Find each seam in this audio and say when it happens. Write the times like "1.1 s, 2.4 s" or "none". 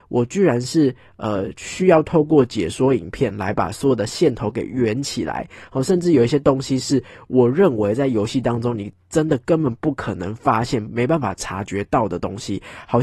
none